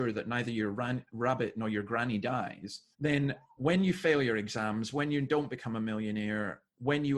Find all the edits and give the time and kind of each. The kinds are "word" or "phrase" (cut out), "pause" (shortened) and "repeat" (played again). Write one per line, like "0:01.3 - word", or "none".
0:02.9 - pause